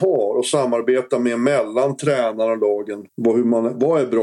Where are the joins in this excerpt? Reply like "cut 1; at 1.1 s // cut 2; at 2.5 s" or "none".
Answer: cut 1; at 3.1 s